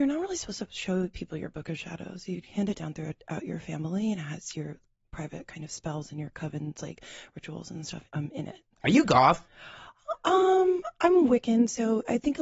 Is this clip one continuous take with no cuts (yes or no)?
no